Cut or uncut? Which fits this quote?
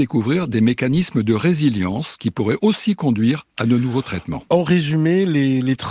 uncut